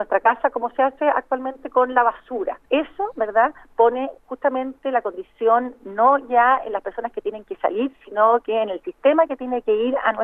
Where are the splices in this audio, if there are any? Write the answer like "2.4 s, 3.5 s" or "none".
2.6 s